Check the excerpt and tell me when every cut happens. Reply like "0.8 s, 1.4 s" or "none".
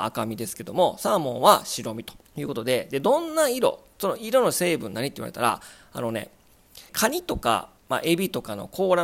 2.3 s, 6.9 s, 7.8 s